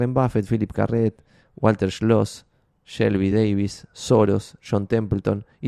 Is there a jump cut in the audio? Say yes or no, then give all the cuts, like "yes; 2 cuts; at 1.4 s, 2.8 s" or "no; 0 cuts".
no; 0 cuts